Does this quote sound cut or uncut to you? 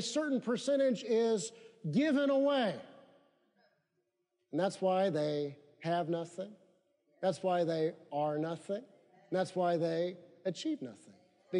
uncut